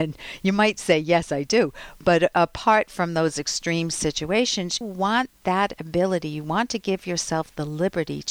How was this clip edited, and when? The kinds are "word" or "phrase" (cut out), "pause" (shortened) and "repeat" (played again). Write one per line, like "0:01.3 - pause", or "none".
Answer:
0:04.8 - word